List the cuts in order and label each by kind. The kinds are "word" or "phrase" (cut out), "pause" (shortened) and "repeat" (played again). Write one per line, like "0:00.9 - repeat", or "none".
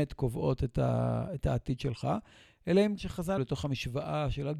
0:03.0 - word
0:03.4 - word